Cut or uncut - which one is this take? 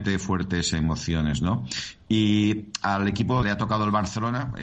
cut